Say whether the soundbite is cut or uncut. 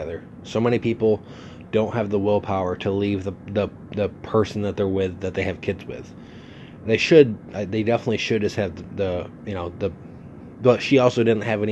uncut